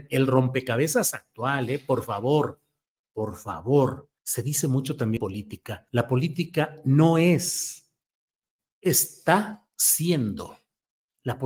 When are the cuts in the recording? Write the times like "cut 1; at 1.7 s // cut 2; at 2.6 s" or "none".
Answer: cut 1; at 4.2 s // cut 2; at 5.2 s // cut 3; at 5.9 s